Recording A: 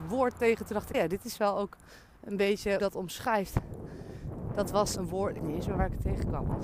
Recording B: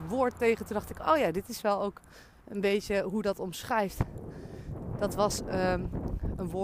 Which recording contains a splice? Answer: A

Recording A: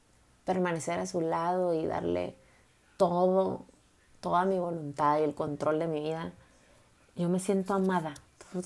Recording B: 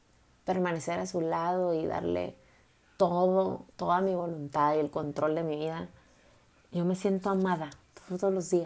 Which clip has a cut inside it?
B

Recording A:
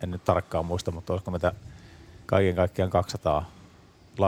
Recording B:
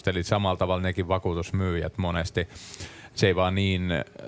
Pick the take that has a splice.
A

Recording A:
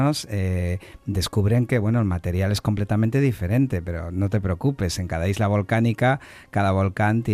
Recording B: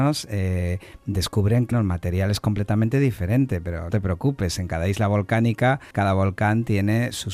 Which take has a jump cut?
B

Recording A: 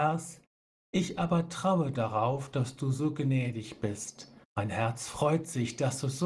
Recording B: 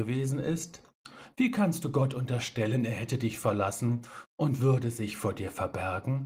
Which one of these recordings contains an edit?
A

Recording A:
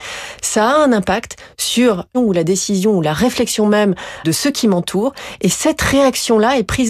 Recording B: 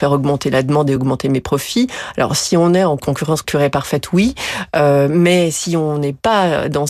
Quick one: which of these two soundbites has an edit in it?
A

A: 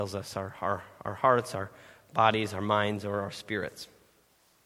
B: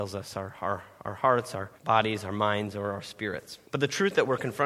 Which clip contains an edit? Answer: B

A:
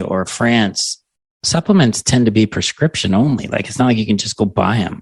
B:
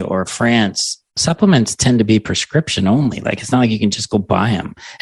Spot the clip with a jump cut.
B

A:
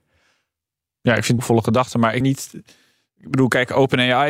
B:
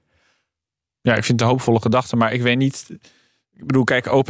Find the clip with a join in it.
A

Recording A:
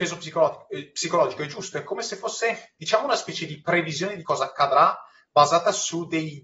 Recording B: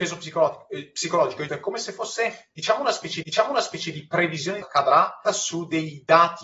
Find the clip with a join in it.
B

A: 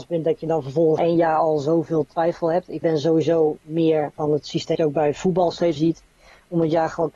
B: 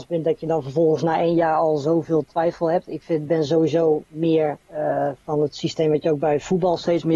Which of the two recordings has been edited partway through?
A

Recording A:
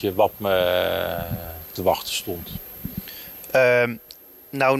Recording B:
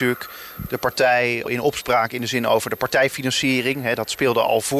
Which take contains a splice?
B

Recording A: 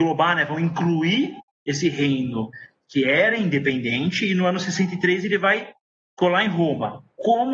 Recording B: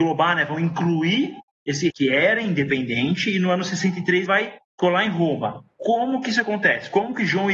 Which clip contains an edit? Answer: B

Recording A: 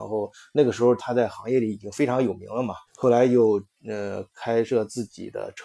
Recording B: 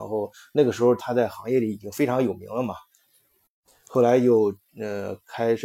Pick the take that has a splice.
A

